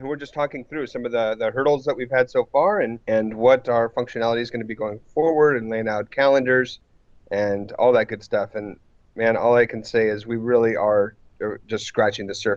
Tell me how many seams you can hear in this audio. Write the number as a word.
one